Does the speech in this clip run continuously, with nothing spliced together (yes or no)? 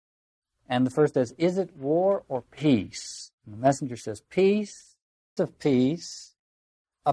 no